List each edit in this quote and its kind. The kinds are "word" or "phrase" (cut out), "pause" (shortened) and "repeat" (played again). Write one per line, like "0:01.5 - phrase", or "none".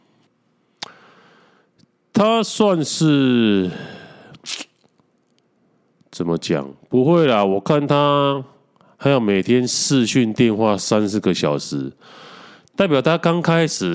none